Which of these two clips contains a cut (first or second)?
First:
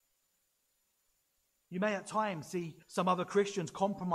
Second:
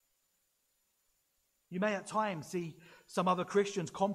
first